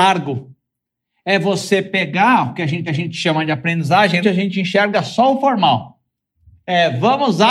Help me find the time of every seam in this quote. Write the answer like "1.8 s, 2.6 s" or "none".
2.9 s, 4.2 s